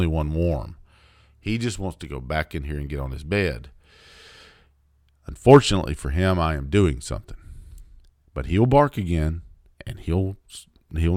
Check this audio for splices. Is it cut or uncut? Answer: uncut